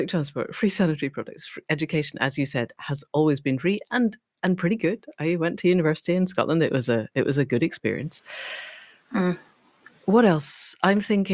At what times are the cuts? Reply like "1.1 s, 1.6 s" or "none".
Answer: none